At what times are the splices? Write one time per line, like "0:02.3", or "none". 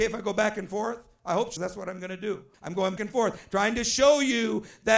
0:01.6
0:02.5
0:03.0